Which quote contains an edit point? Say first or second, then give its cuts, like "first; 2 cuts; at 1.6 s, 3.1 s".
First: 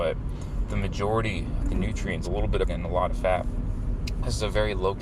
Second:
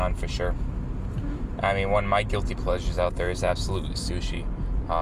first; 3 cuts; at 1.6 s, 2.2 s, 2.7 s